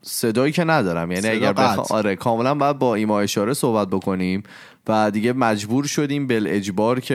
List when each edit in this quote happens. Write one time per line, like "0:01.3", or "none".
none